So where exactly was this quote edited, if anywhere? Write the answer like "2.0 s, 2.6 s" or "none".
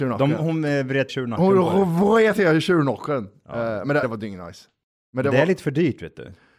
1.1 s, 4.0 s